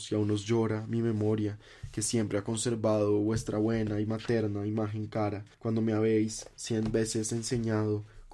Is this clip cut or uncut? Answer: cut